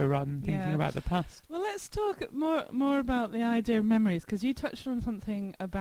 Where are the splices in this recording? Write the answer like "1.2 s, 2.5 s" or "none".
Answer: none